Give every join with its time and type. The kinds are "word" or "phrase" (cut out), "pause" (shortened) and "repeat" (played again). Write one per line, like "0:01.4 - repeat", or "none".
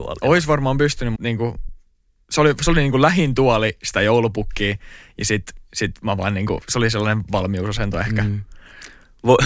0:01.2 - word